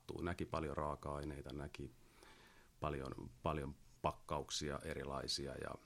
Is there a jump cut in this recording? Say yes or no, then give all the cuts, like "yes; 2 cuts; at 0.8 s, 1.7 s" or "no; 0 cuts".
no; 0 cuts